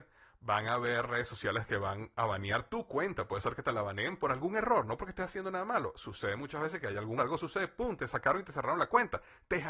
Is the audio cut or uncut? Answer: cut